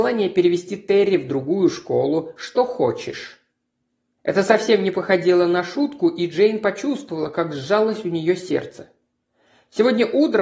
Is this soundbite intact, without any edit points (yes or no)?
yes